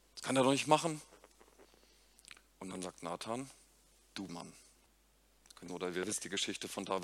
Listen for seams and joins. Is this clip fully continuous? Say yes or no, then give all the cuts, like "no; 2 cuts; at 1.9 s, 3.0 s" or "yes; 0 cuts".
no; 4 cuts; at 2.5 s, 4.3 s, 4.9 s, 5.7 s